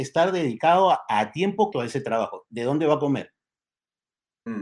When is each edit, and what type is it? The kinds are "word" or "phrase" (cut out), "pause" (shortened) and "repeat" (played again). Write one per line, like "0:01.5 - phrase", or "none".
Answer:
0:01.7 - word